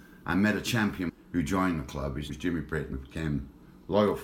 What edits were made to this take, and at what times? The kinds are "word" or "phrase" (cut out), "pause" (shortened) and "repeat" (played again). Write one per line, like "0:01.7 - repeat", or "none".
0:01.1 - word
0:02.3 - word
0:02.9 - word